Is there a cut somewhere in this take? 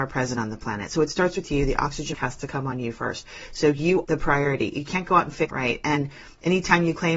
yes; 3 cuts; at 2.1 s, 4.0 s, 5.5 s

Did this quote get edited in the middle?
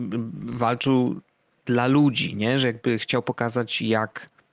no; 0 cuts

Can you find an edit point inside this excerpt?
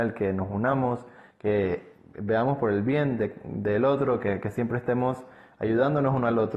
no; 0 cuts

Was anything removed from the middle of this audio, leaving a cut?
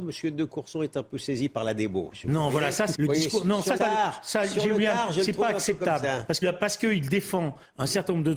yes; 3 cuts; at 2.9 s, 3.8 s, 6.4 s

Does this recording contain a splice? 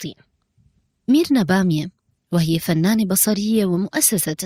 no; 0 cuts

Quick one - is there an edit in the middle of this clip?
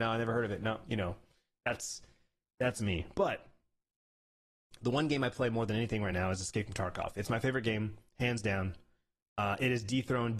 no; 0 cuts

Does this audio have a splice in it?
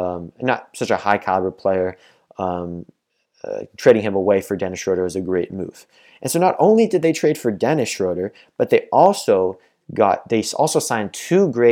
no; 0 cuts

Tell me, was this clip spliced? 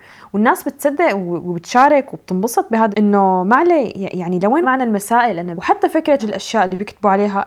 yes; 4 cuts; at 2.9 s, 4.6 s, 5.5 s, 6.2 s

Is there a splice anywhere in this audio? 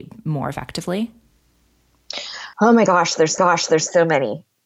yes; 2 cuts; at 2.5 s, 3.4 s

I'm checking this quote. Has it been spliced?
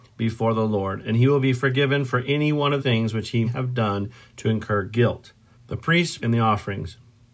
yes; 4 cuts; at 2.8 s, 3.4 s, 5.5 s, 6.2 s

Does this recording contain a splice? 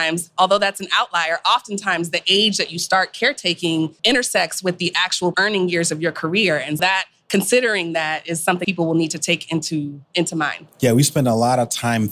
yes; 5 cuts; at 4.0 s, 5.3 s, 6.8 s, 8.6 s, 10.1 s

